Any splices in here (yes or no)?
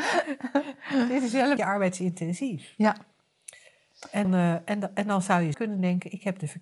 yes